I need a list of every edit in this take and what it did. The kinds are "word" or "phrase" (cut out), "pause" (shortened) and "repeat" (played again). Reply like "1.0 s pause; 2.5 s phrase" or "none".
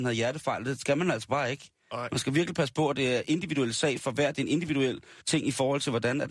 5.2 s pause